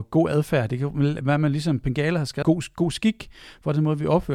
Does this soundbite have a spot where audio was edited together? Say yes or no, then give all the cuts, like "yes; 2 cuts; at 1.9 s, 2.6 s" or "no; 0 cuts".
yes; 1 cut; at 2.4 s